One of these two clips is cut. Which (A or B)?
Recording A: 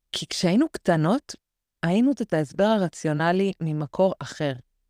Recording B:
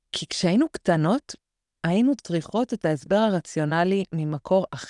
A